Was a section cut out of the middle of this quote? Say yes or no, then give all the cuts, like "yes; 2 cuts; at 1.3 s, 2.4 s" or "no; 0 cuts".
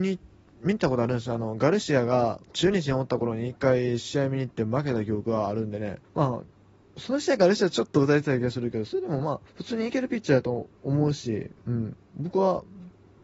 yes; 4 cuts; at 2.4 s, 6.0 s, 9.5 s, 11.6 s